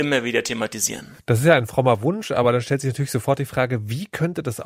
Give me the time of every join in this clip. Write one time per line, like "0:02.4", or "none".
none